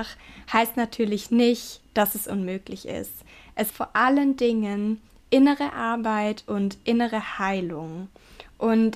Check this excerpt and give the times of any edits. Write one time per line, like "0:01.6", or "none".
0:03.7